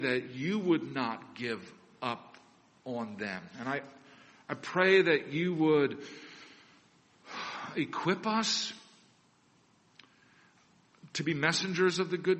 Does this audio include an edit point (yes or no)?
no